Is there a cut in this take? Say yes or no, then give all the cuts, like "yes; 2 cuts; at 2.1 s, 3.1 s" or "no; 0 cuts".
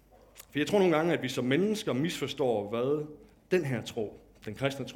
no; 0 cuts